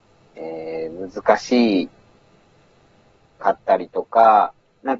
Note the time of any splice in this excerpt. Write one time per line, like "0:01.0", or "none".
none